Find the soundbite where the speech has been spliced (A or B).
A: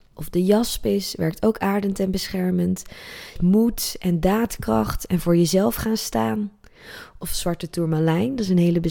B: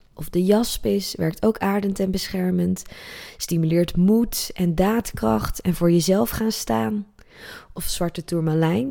A